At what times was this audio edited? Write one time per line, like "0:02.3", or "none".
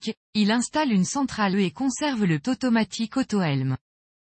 0:01.5
0:02.4